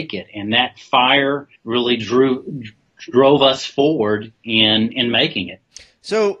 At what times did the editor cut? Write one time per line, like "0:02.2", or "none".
0:01.6